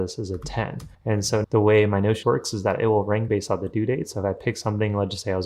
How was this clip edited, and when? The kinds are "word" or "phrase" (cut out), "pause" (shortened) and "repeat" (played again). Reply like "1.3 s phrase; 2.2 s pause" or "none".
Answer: 0.9 s pause; 1.4 s word; 2.2 s word; 3.3 s word